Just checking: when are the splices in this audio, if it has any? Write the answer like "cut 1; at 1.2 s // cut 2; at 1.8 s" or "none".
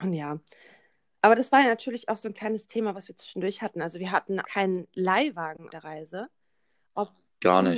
cut 1; at 4.4 s // cut 2; at 5.7 s